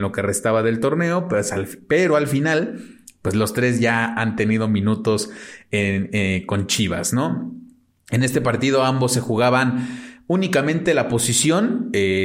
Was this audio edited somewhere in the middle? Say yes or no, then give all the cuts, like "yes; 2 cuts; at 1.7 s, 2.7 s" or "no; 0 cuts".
no; 0 cuts